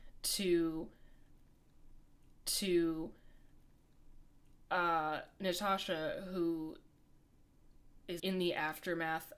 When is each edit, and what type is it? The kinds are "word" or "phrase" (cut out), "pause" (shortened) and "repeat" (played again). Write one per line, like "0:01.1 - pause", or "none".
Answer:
0:02.4 - repeat
0:08.2 - word